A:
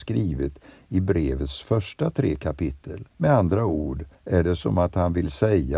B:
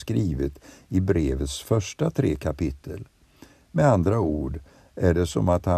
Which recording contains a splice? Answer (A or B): A